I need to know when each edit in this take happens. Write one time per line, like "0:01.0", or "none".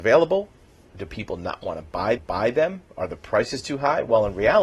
0:02.2

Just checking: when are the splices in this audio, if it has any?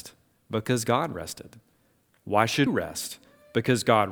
0:02.7

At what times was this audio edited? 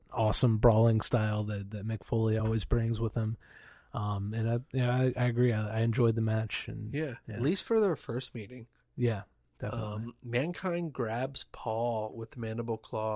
none

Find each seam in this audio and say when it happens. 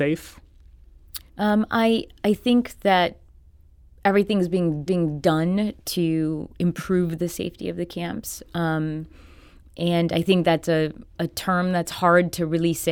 0:01.3
0:04.9
0:11.1

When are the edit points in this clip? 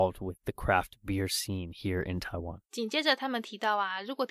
0:02.7

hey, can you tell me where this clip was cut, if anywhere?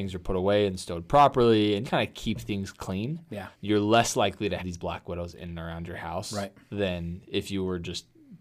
0:01.8
0:03.5
0:04.6

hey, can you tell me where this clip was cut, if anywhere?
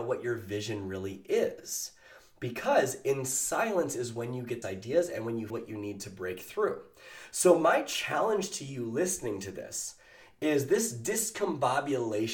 0:04.6
0:05.5

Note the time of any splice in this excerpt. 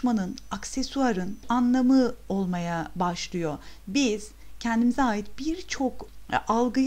0:01.4

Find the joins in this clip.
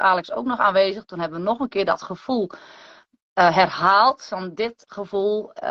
none

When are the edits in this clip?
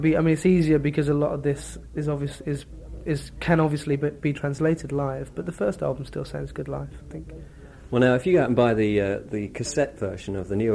none

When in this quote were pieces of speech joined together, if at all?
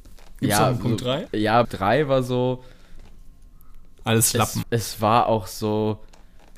0:01.3
0:01.6
0:04.6

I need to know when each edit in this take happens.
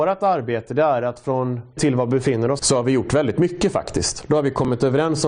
0:01.8
0:02.6

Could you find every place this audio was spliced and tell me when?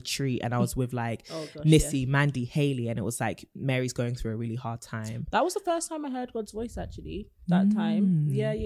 none

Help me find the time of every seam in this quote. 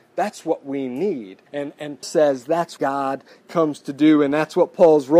0:01.5
0:02.0
0:02.8

